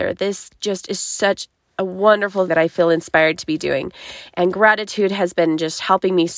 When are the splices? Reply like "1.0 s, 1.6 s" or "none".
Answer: 2.5 s